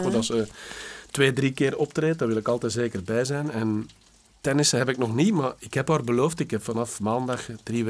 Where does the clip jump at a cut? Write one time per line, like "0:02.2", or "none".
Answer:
none